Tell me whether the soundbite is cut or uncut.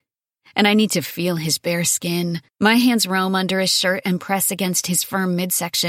cut